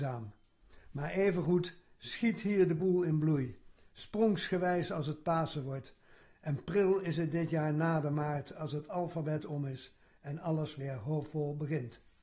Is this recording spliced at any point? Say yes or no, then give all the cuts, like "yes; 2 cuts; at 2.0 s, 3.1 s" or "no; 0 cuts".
no; 0 cuts